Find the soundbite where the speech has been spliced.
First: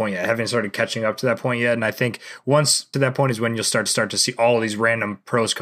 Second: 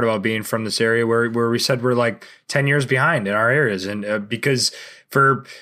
first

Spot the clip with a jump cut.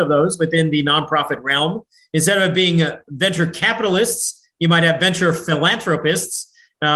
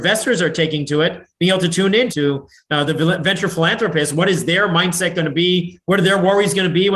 second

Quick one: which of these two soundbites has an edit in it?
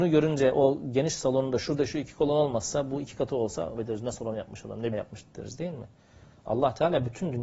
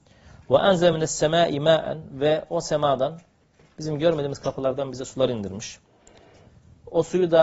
first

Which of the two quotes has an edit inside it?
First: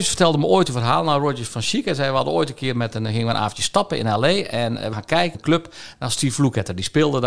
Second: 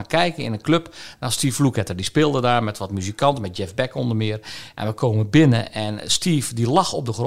first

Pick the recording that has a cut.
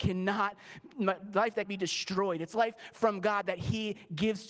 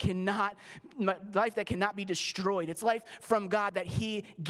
first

